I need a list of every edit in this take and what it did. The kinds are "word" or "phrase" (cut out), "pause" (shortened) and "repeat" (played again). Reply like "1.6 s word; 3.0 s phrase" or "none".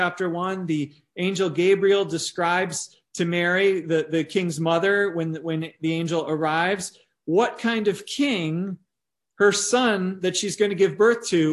none